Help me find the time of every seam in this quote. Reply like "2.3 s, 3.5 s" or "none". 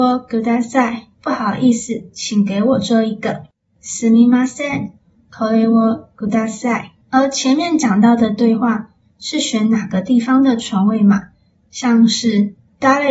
1.1 s, 7.0 s

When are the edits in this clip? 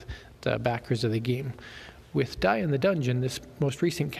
none

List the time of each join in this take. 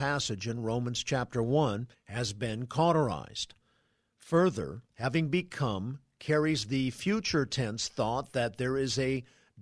1.9 s, 4.9 s

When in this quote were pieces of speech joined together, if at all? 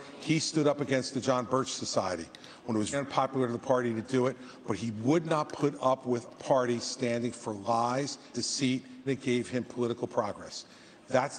2.9 s, 6.3 s, 8.3 s, 9.1 s

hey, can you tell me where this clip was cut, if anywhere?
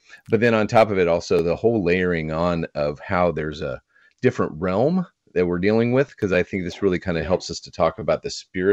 none

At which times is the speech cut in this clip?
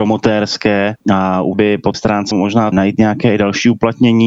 1.0 s, 1.5 s, 1.9 s, 2.3 s, 2.7 s

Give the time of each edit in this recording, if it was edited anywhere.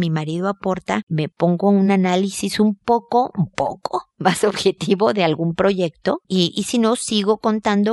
none

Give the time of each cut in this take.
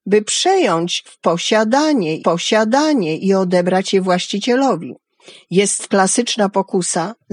1.1 s, 2.2 s, 5.9 s

